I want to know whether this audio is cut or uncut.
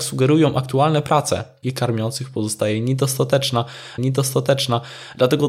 cut